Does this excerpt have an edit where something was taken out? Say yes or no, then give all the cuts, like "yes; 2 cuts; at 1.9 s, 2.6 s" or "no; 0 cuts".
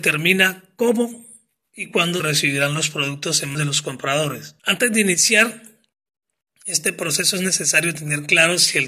yes; 3 cuts; at 2.2 s, 3.5 s, 4.6 s